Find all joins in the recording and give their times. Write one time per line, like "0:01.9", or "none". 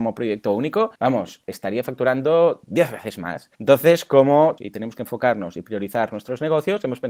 0:01.0
0:03.5
0:04.6